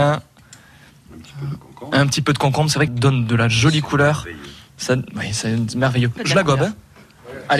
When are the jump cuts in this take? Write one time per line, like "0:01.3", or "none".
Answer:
0:02.9
0:06.2